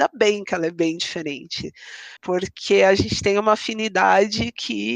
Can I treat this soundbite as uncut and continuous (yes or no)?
no